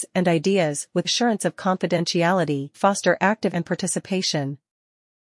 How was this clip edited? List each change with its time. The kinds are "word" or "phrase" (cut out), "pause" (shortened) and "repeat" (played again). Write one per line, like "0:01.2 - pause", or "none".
0:01.0 - word
0:02.7 - word
0:03.5 - word